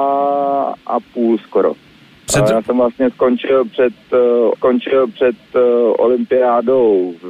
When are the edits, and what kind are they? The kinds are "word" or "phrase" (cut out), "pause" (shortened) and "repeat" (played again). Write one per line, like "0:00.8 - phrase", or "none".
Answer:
0:04.5 - repeat